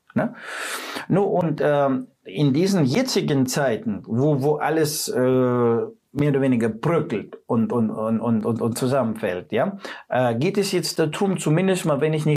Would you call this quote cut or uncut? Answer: cut